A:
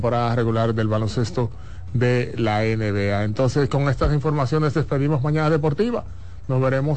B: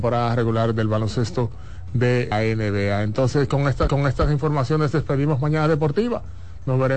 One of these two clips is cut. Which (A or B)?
B